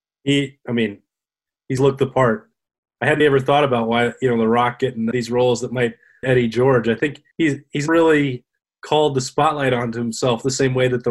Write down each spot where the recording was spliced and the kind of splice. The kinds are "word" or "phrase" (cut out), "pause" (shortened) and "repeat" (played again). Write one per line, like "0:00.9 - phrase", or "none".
0:01.8 - word
0:03.2 - word
0:05.1 - word
0:06.2 - phrase
0:07.3 - pause
0:07.9 - word